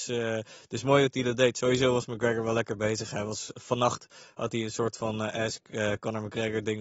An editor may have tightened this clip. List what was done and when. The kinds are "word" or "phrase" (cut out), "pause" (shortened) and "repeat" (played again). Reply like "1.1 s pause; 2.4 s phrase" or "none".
none